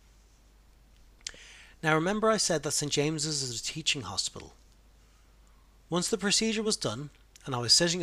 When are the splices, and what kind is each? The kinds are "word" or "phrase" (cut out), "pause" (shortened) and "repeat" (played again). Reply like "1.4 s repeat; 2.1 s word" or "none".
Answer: none